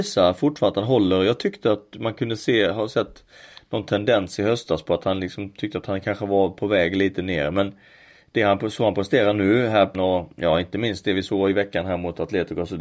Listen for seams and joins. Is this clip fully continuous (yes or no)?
no